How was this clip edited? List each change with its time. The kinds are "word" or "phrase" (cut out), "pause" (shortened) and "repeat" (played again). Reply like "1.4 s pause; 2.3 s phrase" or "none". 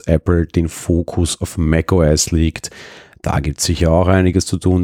none